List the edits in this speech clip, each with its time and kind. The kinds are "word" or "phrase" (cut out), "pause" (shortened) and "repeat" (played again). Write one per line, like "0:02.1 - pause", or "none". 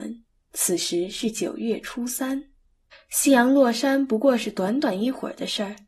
0:02.9 - pause

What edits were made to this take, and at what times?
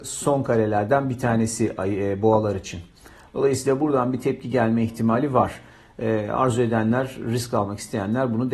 none

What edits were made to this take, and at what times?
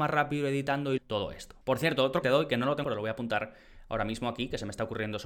0:01.0 - word
0:02.2 - phrase
0:02.8 - word

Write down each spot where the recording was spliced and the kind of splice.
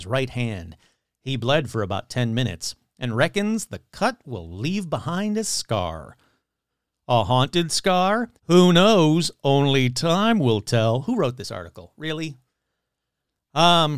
0:08.4 - pause

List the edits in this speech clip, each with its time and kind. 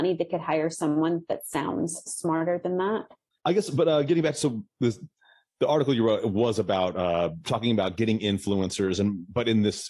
none

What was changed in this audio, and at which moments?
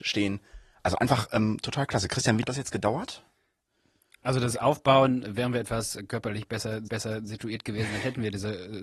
0:02.4 - word
0:06.9 - repeat

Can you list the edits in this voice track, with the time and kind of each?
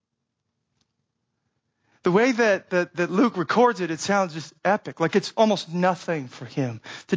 none

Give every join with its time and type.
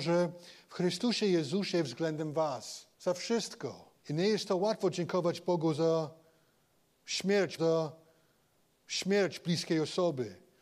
0:02.9 - pause
0:04.0 - pause
0:07.6 - repeat

